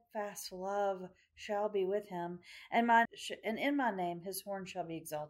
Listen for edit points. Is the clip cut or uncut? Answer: cut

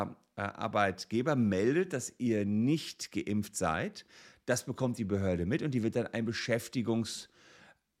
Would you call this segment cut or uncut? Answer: uncut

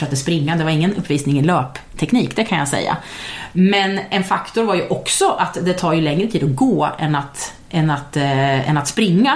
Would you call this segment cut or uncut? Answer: uncut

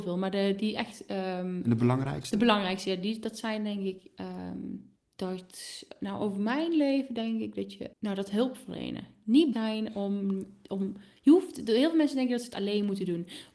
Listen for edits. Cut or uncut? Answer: cut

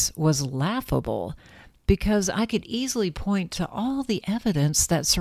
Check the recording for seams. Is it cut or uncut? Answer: uncut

